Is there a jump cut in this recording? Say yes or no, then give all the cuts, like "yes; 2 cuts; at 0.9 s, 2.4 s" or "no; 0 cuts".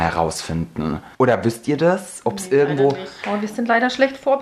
yes; 1 cut; at 1.1 s